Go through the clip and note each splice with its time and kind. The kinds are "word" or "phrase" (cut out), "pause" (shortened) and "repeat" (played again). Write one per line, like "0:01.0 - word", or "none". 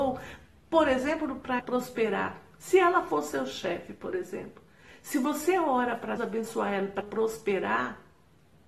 0:01.6 - word
0:06.2 - word
0:07.0 - word